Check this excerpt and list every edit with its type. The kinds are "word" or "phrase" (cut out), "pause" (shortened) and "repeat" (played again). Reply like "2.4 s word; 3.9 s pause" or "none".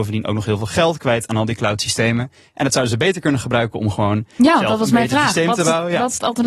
none